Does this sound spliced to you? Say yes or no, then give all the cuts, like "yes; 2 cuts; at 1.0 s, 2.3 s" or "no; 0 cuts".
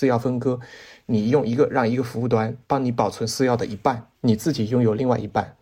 yes; 2 cuts; at 2.6 s, 4.1 s